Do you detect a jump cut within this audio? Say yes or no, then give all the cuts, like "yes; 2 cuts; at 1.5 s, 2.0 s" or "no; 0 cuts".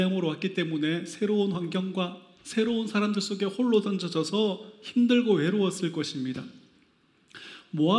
no; 0 cuts